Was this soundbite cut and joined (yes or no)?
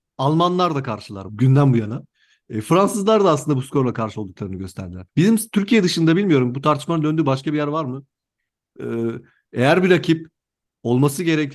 yes